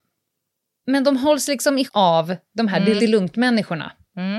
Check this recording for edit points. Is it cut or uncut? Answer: cut